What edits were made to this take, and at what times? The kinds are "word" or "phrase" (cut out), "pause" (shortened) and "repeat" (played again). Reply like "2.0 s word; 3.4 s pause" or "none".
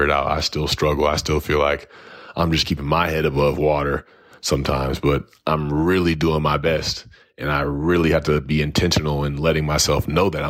none